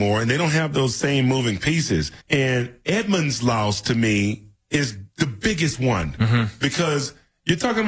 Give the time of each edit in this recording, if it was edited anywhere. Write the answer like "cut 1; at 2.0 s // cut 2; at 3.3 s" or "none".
cut 1; at 2.2 s